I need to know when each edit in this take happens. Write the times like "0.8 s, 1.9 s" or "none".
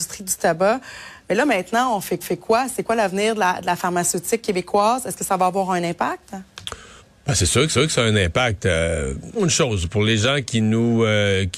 2.2 s, 7.0 s, 7.7 s, 9.3 s